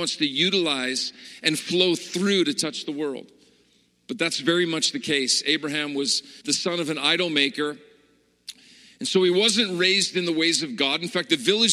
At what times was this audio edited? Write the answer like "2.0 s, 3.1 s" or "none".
6.4 s